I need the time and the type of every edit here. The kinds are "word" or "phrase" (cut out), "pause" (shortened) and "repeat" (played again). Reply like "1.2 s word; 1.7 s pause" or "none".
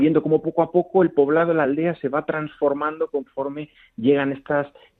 none